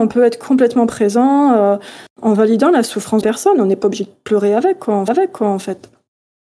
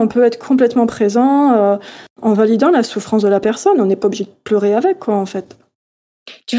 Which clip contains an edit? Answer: first; 2 cuts; at 3.2 s, 5.1 s

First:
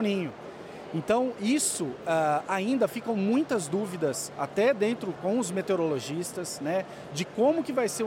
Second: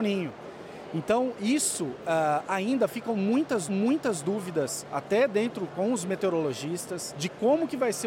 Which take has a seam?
second; 2 cuts; at 3.7 s, 7.1 s

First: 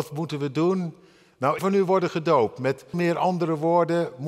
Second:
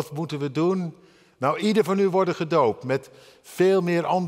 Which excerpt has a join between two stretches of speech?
first; 2 cuts; at 1.6 s, 2.9 s

